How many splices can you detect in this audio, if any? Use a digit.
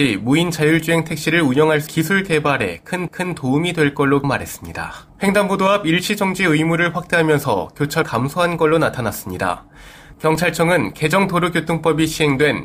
5